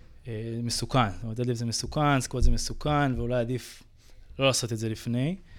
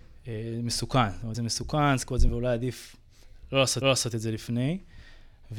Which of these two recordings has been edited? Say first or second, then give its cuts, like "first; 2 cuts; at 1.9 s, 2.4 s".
second; 3 cuts; at 1.3 s, 2.3 s, 3.8 s